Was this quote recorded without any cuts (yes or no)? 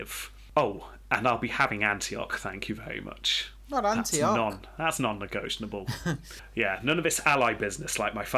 yes